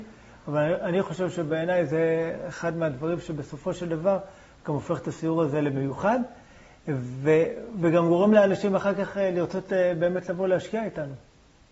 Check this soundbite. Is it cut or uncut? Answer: uncut